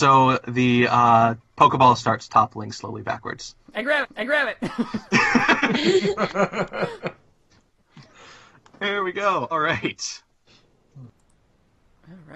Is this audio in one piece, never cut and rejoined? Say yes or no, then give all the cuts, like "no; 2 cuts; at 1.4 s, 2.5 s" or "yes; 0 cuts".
no; 2 cuts; at 4.0 s, 9.5 s